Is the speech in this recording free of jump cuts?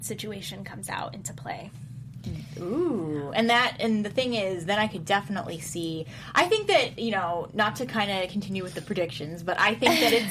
yes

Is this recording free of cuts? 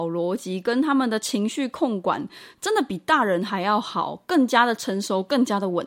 yes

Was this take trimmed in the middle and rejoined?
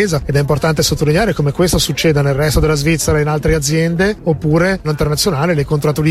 yes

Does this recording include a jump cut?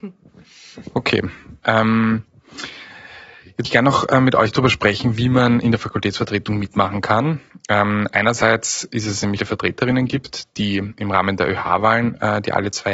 yes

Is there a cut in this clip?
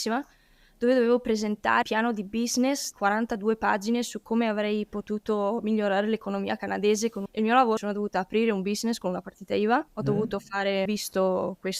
yes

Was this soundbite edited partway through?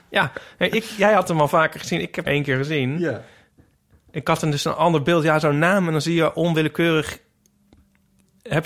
yes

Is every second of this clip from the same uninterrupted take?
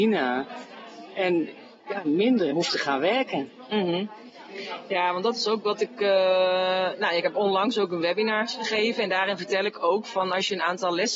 no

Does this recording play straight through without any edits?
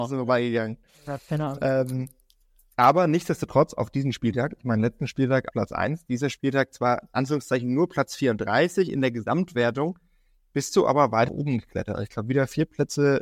no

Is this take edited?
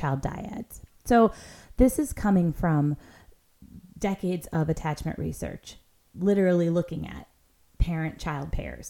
no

